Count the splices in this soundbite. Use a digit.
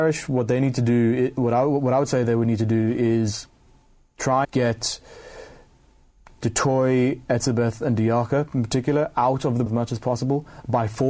2